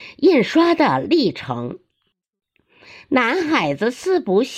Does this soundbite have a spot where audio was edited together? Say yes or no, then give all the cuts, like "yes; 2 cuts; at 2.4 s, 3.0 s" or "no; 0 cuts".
no; 0 cuts